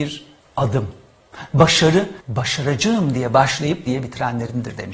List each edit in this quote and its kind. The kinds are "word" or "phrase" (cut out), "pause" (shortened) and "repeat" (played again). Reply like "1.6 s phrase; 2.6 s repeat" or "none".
2.2 s pause; 3.9 s word